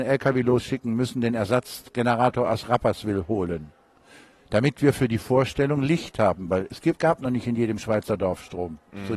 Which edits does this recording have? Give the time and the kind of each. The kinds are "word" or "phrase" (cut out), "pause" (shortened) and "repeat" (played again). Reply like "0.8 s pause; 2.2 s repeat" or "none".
none